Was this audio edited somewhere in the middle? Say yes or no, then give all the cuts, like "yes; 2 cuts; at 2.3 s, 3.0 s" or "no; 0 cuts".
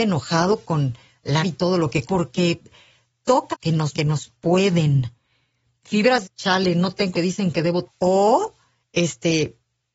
yes; 7 cuts; at 1.4 s, 2.1 s, 3.5 s, 3.9 s, 6.2 s, 7.1 s, 7.9 s